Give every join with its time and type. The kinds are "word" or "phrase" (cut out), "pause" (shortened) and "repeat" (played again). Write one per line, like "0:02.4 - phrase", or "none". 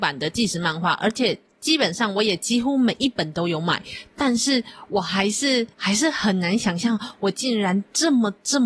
0:05.7 - pause